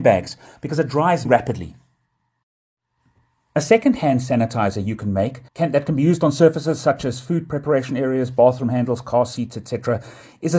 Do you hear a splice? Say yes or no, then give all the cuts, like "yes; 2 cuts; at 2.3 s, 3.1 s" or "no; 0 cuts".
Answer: yes; 2 cuts; at 1.2 s, 5.5 s